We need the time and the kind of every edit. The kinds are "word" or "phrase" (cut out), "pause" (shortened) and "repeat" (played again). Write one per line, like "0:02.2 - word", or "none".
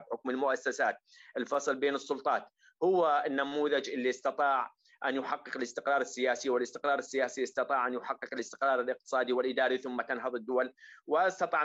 none